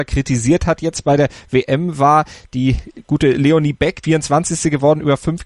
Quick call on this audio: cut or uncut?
cut